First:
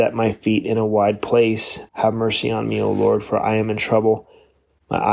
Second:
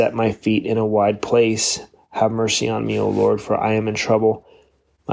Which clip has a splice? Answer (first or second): first